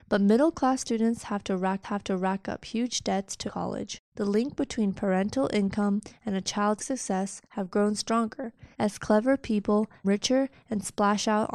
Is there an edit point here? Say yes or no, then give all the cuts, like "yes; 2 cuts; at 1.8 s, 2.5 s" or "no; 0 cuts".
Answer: yes; 7 cuts; at 1.8 s, 3.5 s, 4.0 s, 6.8 s, 7.4 s, 8.7 s, 10.0 s